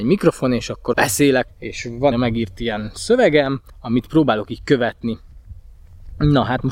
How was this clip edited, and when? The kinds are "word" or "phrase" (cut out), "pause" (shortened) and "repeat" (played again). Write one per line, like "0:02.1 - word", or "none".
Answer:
0:00.9 - word
0:01.5 - word
0:02.1 - phrase
0:03.7 - pause